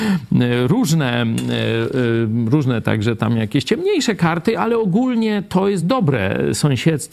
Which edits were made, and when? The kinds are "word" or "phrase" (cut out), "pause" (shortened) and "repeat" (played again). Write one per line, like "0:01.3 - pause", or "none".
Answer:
none